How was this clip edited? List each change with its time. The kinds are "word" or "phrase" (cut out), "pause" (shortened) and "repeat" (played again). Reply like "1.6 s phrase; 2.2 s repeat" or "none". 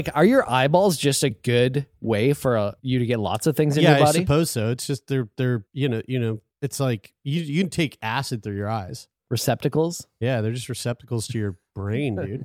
2.8 s pause; 5.7 s pause; 6.5 s pause